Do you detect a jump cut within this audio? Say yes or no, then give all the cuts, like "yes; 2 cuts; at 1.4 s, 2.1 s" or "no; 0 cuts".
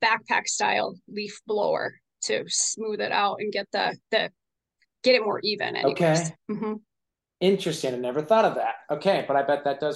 no; 0 cuts